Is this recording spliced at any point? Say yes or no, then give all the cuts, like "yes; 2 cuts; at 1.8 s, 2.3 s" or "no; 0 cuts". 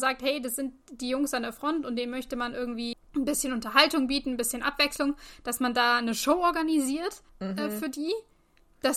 yes; 2 cuts; at 2.9 s, 7.3 s